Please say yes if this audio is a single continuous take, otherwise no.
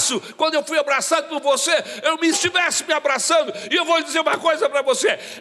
no